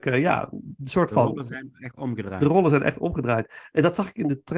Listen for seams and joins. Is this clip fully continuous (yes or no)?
yes